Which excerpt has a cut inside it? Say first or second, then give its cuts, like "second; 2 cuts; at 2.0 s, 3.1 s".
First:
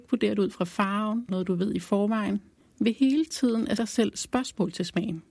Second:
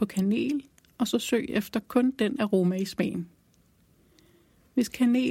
first; 3 cuts; at 1.3 s, 2.6 s, 3.8 s